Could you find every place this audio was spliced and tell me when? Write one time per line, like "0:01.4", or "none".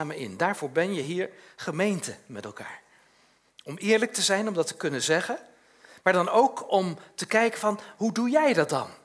none